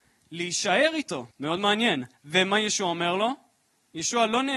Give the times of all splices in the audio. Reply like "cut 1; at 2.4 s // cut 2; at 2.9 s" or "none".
cut 1; at 1.3 s // cut 2; at 2.1 s